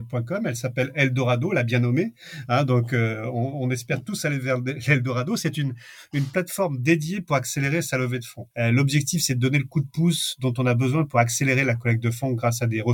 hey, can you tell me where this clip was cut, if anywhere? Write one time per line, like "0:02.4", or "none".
0:08.5